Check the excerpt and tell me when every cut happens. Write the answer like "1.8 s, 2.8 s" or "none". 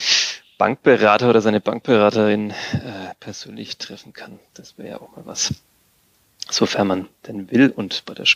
none